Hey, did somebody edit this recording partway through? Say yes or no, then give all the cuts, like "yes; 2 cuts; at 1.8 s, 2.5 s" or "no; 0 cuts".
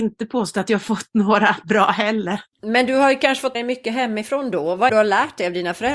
yes; 3 cuts; at 2.5 s, 3.5 s, 4.9 s